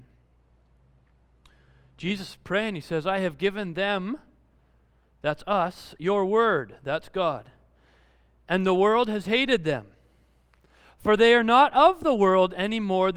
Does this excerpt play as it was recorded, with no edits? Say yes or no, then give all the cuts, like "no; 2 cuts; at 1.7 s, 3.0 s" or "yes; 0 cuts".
yes; 0 cuts